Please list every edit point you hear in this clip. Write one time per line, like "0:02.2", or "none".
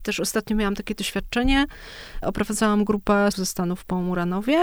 0:02.2
0:03.3